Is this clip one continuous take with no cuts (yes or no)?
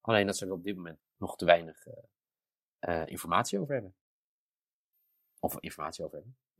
no